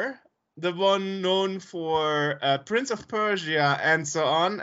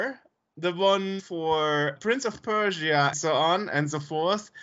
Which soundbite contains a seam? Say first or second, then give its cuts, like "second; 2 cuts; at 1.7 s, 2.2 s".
second; 3 cuts; at 1.2 s, 2.0 s, 3.1 s